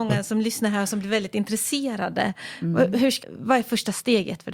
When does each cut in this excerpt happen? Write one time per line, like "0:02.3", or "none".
0:03.2